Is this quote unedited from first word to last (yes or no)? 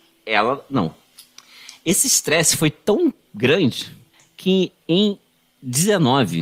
yes